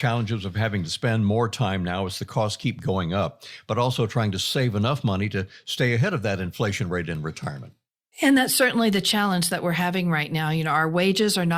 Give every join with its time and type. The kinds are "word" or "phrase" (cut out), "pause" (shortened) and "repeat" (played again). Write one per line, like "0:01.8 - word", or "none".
none

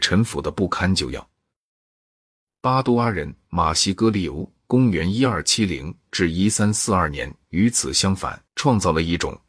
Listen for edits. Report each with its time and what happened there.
0:08.5 - pause

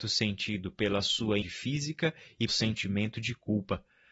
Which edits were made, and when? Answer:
0:01.4 - word
0:02.5 - word

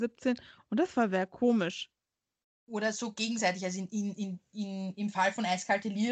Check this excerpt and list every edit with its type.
none

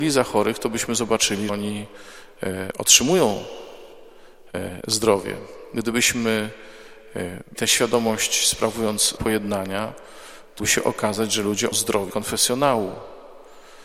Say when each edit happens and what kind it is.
0:01.5 - word
0:07.5 - word
0:09.2 - word
0:10.6 - word
0:11.7 - word
0:12.1 - word

